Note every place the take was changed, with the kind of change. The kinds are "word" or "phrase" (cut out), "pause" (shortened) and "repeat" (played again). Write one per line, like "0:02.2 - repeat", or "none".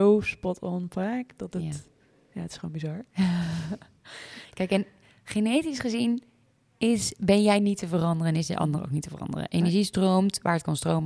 none